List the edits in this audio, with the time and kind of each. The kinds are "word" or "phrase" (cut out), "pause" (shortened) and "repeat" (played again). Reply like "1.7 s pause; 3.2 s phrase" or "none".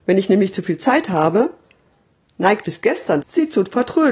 2.6 s word; 3.2 s word